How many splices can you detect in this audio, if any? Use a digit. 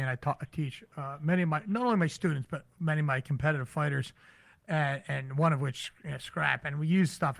0